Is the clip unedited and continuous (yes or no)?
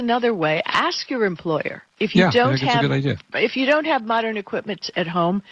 no